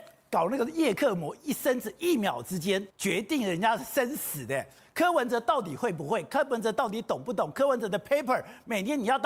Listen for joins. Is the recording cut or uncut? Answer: cut